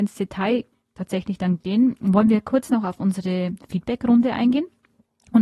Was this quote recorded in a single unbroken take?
yes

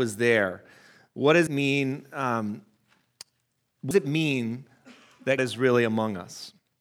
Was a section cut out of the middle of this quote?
yes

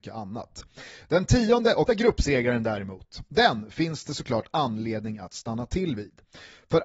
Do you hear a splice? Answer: yes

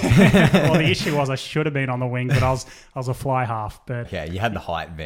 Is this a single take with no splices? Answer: no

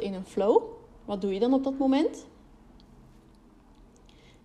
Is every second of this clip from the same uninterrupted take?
yes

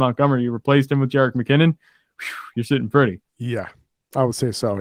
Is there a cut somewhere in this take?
yes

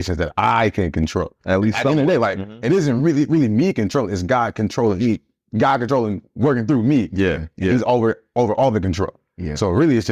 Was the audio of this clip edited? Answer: no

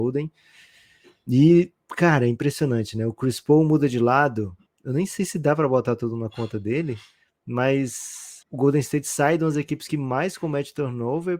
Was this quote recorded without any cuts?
no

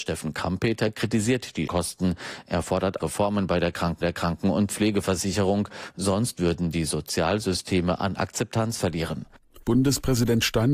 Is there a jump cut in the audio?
yes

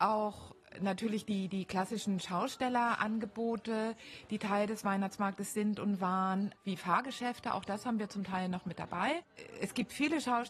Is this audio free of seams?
yes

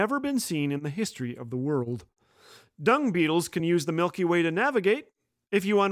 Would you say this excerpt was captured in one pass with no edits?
yes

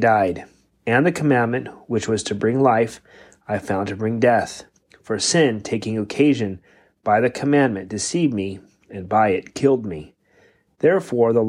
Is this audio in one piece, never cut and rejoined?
yes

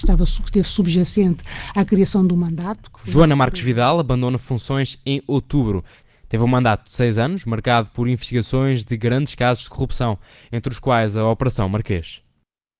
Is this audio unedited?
yes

